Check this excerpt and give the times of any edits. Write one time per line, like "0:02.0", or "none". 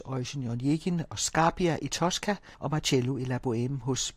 0:02.5